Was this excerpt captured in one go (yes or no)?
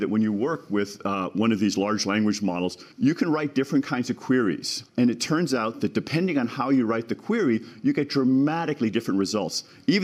no